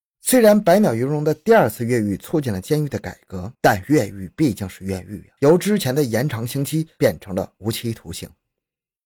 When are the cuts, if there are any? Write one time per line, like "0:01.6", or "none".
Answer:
0:03.5
0:05.4